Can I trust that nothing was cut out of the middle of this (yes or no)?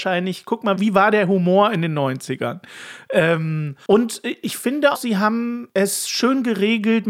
no